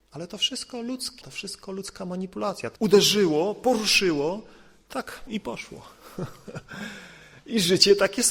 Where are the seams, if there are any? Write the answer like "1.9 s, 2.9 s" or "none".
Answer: 1.2 s, 2.8 s, 5.3 s

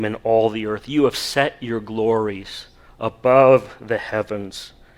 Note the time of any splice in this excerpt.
none

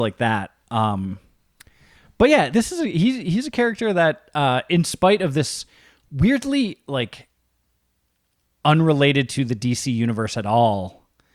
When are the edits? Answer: 2.5 s

